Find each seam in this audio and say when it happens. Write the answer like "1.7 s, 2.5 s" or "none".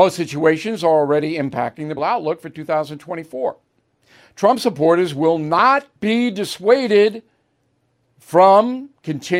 2.0 s, 6.0 s